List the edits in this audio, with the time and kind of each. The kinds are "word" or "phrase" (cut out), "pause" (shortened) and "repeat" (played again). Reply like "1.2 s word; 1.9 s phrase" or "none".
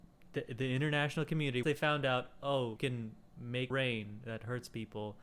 1.6 s word; 2.8 s word; 3.7 s word